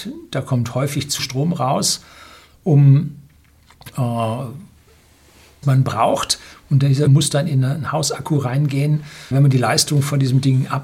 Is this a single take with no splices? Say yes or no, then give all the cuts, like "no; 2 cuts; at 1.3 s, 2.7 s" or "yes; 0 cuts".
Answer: no; 4 cuts; at 1.2 s, 5.6 s, 7.1 s, 9.3 s